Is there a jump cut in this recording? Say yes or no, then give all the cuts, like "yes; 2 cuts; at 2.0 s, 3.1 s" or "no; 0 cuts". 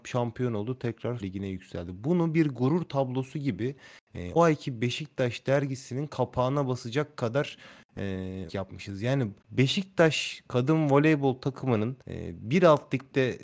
yes; 5 cuts; at 1.2 s, 4.4 s, 8.5 s, 9.4 s, 12.0 s